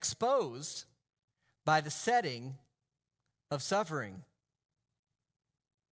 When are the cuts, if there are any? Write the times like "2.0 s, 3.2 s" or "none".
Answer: none